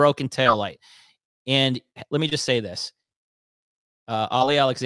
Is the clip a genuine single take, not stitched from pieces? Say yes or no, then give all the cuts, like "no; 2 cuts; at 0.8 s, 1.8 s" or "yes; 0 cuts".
yes; 0 cuts